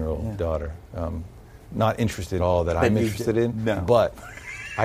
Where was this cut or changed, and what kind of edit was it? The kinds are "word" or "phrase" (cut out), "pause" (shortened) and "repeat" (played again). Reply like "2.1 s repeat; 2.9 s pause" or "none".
1.6 s pause; 2.4 s phrase